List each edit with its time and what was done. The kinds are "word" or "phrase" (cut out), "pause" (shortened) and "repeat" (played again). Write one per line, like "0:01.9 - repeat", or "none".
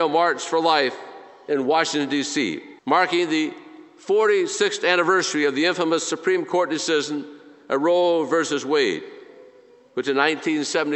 0:02.8 - pause